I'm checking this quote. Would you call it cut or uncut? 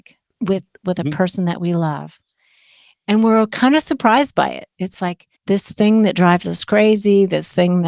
cut